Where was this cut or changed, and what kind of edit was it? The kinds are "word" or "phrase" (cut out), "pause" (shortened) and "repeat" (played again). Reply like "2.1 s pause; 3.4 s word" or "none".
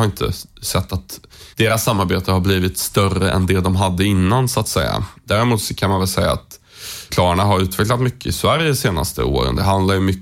1.5 s pause; 7.1 s phrase